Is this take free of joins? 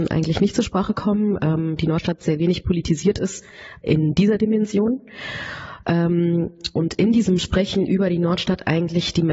yes; 0 cuts

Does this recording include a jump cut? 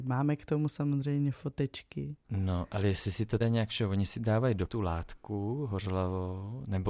yes; 2 cuts; at 3.4 s, 4.7 s

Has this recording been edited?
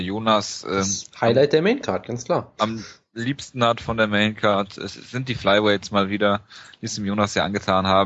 no; 0 cuts

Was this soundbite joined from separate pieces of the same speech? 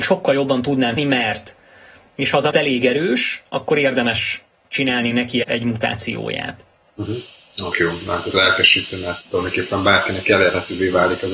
yes; 6 cuts; at 1.0 s, 2.5 s, 5.4 s, 7.7 s, 8.3 s, 9.2 s

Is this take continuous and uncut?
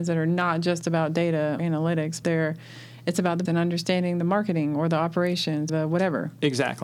no; 4 cuts; at 1.6 s, 2.2 s, 3.4 s, 5.7 s

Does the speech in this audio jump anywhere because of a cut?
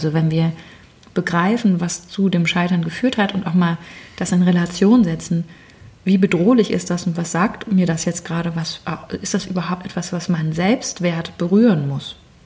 no; 0 cuts

